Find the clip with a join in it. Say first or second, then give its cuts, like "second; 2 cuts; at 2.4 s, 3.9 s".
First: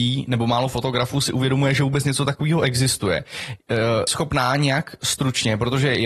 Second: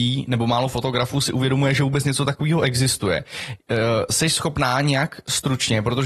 first; 1 cut; at 4.1 s